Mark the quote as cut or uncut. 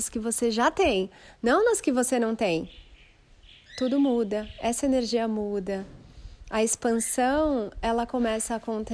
uncut